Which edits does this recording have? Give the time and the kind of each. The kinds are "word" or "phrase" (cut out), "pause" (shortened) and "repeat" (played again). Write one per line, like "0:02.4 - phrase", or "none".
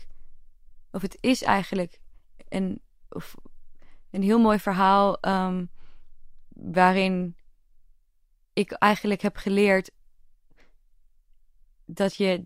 none